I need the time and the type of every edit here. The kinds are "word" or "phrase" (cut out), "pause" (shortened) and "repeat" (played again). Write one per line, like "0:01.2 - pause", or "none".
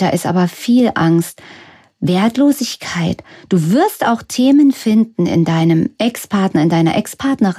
none